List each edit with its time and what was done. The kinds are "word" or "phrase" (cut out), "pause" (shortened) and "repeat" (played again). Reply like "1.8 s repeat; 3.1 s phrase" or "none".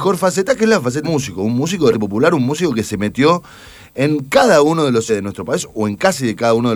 1.0 s word; 1.9 s word; 5.1 s word